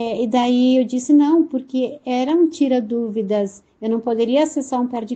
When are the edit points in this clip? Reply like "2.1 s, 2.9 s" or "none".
none